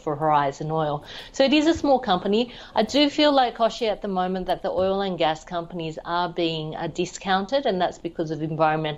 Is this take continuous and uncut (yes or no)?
yes